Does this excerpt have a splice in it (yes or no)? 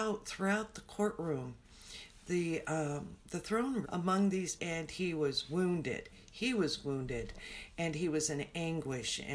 yes